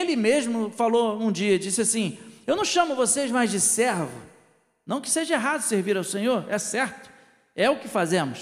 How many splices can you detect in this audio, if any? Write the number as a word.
zero